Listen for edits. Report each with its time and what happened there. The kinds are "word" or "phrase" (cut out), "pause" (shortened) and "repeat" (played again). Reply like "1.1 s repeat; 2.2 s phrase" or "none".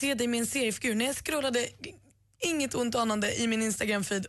none